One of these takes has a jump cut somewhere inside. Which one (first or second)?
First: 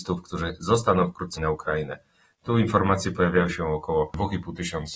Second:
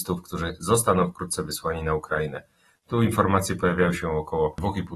first